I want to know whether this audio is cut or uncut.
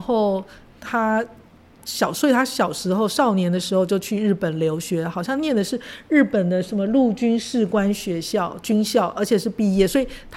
uncut